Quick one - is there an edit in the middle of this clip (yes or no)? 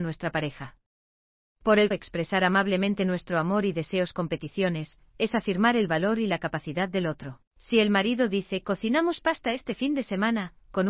yes